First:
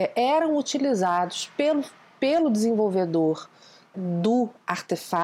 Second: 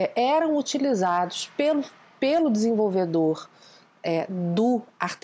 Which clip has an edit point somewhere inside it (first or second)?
first